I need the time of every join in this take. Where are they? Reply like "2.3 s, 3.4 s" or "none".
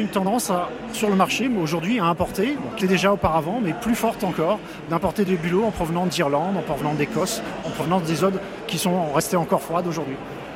2.8 s

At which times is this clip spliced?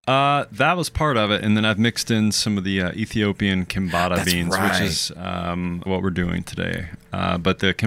5.9 s

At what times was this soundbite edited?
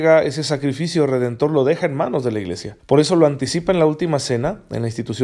2.8 s

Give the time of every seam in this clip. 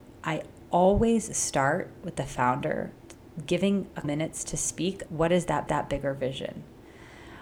4.0 s, 5.1 s, 5.7 s

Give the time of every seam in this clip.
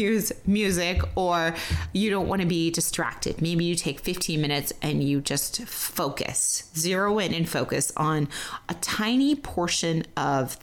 none

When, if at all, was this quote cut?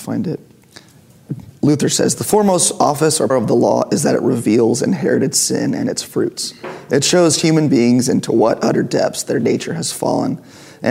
3.3 s

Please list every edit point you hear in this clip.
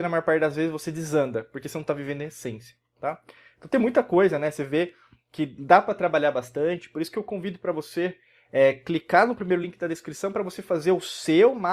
none

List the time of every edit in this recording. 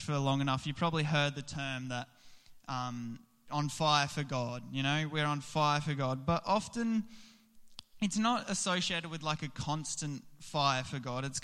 none

